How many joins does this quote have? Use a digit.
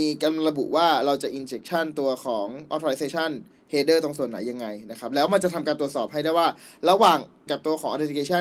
1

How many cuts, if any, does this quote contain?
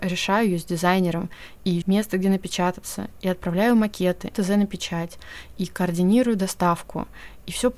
2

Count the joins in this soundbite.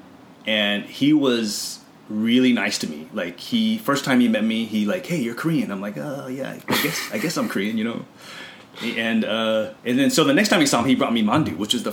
1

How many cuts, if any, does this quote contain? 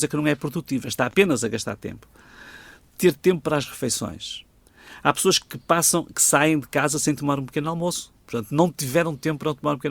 0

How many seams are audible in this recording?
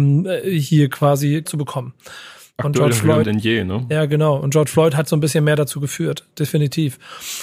2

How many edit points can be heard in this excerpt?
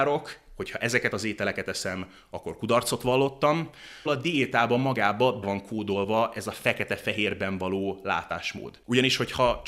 2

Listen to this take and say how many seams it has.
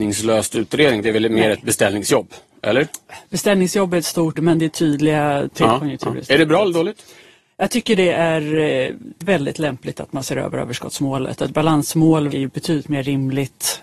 4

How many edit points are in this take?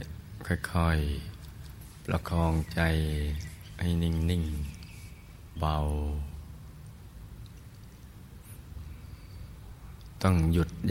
1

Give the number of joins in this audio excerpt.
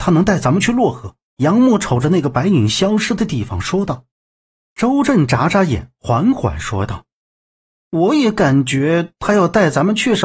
3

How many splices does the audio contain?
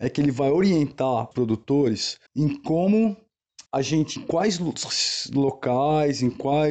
4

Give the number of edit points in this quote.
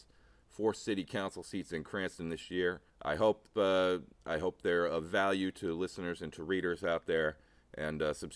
1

